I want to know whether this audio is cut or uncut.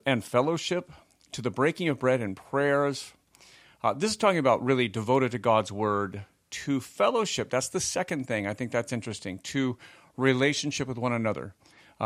uncut